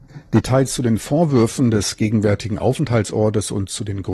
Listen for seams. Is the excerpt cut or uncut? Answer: uncut